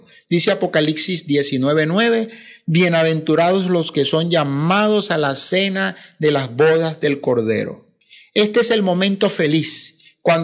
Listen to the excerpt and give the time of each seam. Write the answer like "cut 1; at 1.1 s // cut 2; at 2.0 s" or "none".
none